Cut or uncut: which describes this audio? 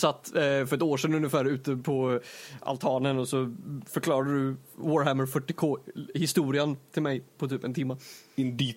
uncut